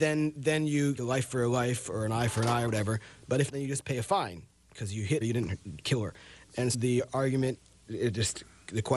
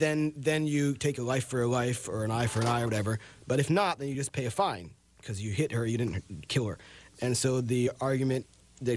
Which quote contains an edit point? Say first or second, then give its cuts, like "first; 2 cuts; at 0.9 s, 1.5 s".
first; 5 cuts; at 1.0 s, 3.5 s, 5.2 s, 6.7 s, 7.8 s